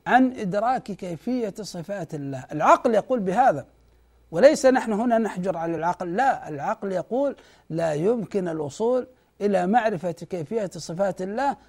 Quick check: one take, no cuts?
yes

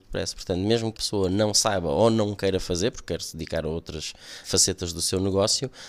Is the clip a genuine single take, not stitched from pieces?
no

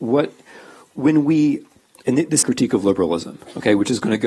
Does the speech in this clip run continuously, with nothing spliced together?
no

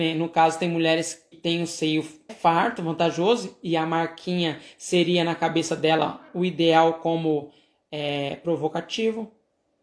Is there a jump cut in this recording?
yes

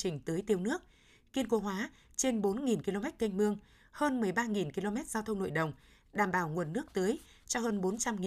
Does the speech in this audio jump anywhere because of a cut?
no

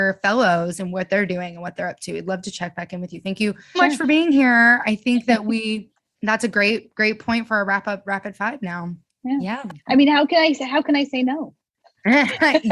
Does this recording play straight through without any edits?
no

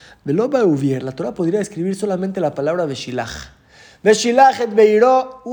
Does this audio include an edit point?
no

